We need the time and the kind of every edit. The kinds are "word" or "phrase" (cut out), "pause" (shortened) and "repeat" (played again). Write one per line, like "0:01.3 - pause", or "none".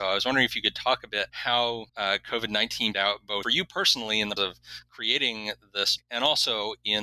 0:01.3 - word
0:01.9 - pause
0:02.9 - word
0:03.4 - word
0:04.4 - word
0:06.0 - word